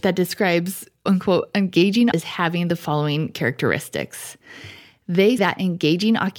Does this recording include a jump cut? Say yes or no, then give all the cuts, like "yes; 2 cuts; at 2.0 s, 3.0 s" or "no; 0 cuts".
yes; 3 cuts; at 1.1 s, 2.1 s, 5.4 s